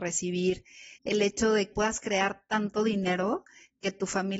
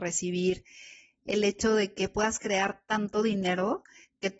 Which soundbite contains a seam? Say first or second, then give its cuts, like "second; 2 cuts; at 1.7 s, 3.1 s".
first; 2 cuts; at 1.0 s, 1.7 s